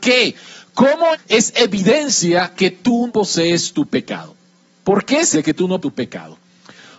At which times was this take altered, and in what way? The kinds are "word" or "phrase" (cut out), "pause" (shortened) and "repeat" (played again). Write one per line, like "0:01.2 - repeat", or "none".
0:01.1 - word
0:02.5 - word
0:03.1 - word
0:05.3 - word
0:05.8 - word